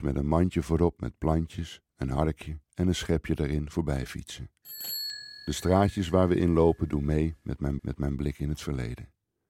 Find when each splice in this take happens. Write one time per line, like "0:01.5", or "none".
0:02.6
0:07.8